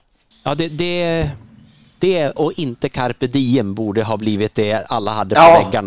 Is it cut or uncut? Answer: cut